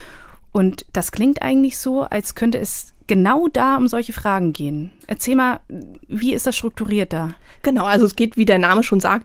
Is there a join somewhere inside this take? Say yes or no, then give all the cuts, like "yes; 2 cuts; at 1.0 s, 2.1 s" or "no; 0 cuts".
no; 0 cuts